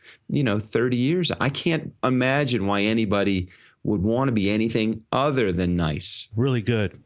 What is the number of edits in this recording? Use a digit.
0